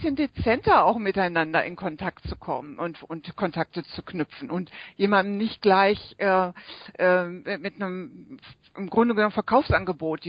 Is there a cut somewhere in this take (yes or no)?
no